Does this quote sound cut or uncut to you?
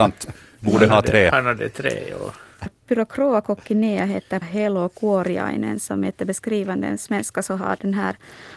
cut